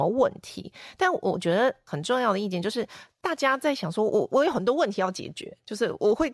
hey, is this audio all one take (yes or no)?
no